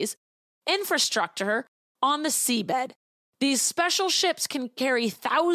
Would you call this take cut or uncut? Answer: uncut